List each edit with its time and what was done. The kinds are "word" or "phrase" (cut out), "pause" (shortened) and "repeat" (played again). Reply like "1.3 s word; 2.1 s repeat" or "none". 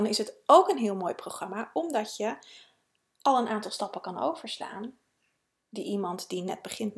none